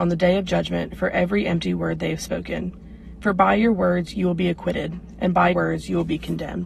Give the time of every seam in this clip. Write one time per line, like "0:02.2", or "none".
0:05.5